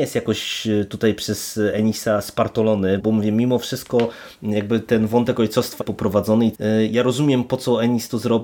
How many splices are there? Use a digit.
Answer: 3